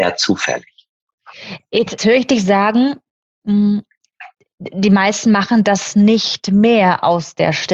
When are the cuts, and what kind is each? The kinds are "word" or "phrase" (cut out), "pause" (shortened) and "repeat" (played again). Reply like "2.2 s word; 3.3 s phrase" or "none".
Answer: 2.0 s word